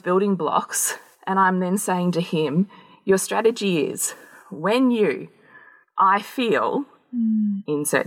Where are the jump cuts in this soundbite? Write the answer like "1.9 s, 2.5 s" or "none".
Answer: none